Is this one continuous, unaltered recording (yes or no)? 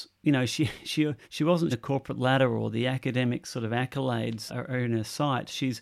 no